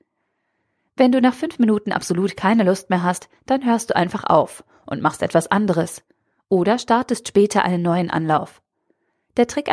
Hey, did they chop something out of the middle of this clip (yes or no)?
no